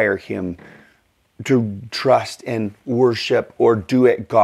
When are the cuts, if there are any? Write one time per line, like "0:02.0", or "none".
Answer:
0:01.9